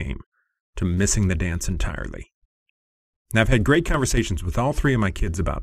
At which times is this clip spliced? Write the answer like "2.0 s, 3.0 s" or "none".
none